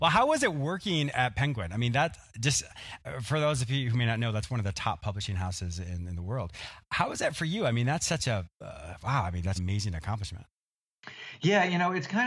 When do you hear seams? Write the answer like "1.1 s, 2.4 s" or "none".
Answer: 8.5 s, 9.6 s